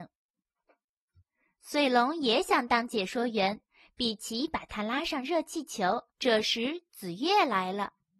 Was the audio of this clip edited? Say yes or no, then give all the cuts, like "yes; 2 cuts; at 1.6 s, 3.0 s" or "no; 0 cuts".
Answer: yes; 1 cut; at 6.1 s